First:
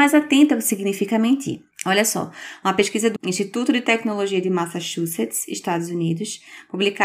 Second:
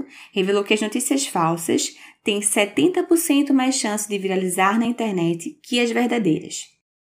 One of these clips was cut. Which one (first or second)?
first